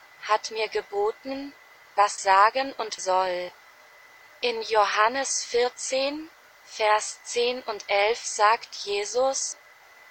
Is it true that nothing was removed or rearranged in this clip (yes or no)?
no